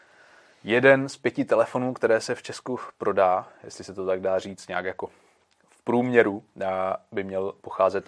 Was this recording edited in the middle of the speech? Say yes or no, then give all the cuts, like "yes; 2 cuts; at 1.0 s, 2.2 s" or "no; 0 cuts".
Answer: no; 0 cuts